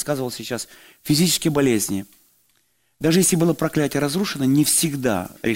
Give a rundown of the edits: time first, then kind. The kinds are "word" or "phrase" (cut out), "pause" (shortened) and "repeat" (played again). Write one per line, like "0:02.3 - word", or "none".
none

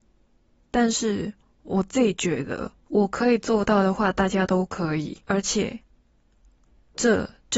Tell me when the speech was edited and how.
0:02.8 - pause
0:05.2 - pause

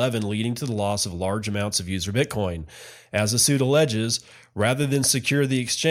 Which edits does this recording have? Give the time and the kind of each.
none

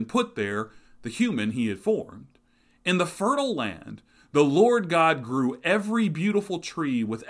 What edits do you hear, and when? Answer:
none

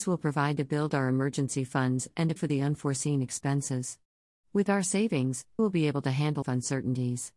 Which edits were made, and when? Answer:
0:02.4 - word
0:05.6 - word
0:06.4 - word

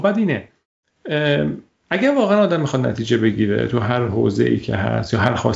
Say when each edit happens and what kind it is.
none

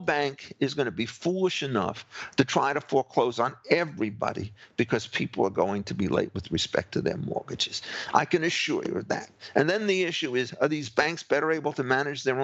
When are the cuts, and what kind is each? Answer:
none

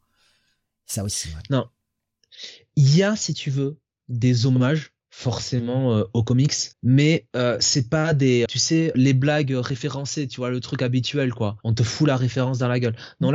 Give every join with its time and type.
0:05.0 - pause
0:06.7 - pause
0:08.5 - word
0:08.9 - word
0:11.6 - pause

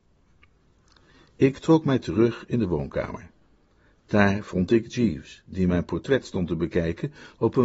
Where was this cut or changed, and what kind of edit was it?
none

